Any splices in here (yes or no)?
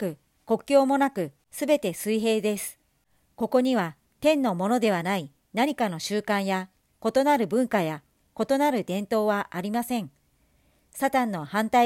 no